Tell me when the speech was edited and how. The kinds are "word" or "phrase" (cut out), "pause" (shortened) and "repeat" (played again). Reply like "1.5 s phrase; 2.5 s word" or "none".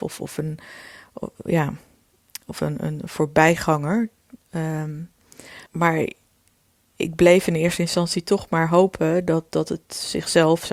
5.7 s pause